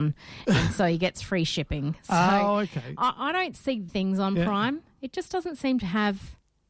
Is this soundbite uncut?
no; 1 cut; at 3.9 s

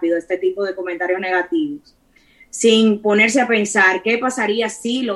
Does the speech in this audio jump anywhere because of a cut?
no; 0 cuts

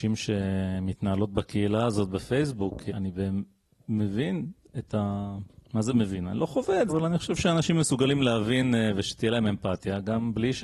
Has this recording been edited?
yes; 2 cuts; at 2.9 s, 6.9 s

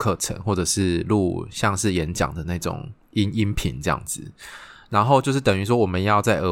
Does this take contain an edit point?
yes; 1 cut; at 3.0 s

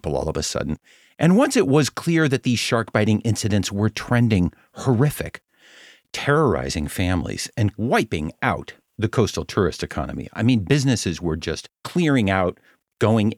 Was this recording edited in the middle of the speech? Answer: yes; 1 cut; at 11.7 s

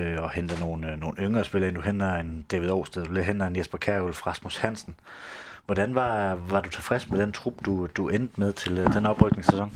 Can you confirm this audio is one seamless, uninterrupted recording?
yes; 0 cuts

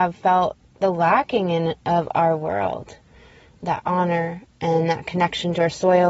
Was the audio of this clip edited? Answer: no; 0 cuts

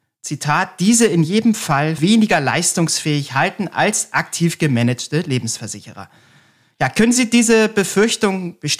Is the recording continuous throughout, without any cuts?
no; 1 cut; at 2.0 s

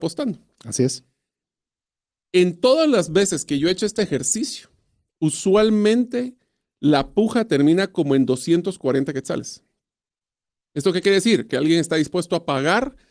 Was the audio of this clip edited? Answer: no; 0 cuts

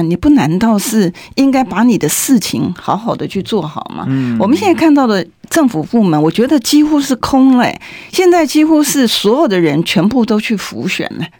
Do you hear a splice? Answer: no; 0 cuts

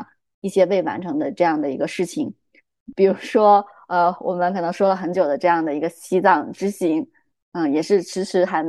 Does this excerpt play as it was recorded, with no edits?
yes; 0 cuts

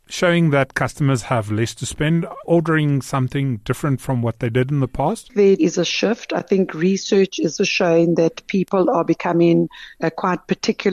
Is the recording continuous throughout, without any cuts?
no; 3 cuts; at 2.4 s, 5.6 s, 7.6 s

